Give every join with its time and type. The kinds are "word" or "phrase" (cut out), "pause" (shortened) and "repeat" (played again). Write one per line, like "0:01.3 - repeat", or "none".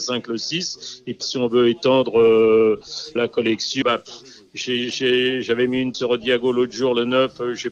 0:01.2 - word
0:03.2 - word
0:03.8 - word
0:05.9 - word